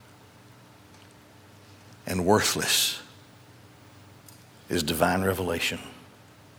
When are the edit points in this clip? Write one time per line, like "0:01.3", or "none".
none